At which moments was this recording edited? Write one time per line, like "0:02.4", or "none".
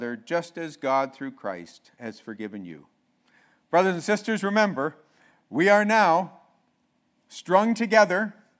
none